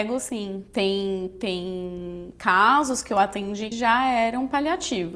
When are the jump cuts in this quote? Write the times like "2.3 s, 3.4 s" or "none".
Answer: 3.7 s